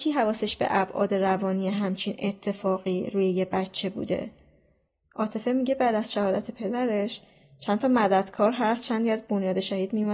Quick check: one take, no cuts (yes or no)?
yes